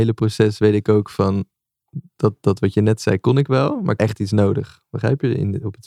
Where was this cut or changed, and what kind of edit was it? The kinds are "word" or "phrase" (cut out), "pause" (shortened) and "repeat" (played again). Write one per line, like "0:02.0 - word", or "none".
0:04.0 - word